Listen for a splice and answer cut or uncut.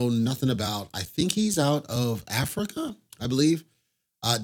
uncut